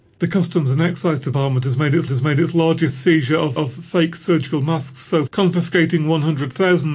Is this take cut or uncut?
cut